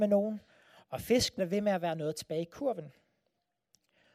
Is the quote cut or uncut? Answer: cut